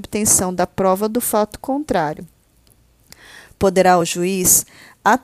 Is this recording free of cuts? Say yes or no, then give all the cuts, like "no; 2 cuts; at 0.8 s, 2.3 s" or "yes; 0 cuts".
yes; 0 cuts